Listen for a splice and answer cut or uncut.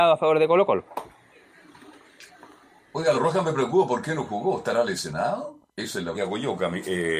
cut